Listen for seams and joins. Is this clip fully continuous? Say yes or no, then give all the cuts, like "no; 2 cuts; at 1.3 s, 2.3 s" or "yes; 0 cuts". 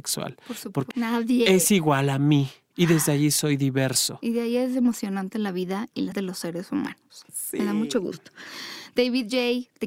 no; 2 cuts; at 0.9 s, 6.1 s